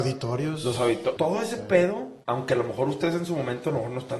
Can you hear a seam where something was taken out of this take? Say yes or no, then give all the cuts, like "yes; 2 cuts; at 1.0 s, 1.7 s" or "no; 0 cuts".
yes; 2 cuts; at 1.2 s, 2.2 s